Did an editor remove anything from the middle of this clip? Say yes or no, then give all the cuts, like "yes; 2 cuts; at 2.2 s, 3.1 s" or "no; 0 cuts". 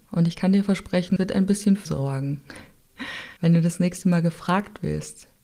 yes; 3 cuts; at 1.2 s, 1.8 s, 3.4 s